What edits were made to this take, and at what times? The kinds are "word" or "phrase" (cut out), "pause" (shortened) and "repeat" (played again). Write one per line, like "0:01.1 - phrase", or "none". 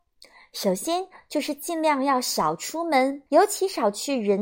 0:03.3 - pause